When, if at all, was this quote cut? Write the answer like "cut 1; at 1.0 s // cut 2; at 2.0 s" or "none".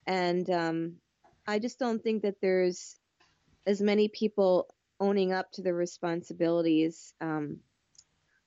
none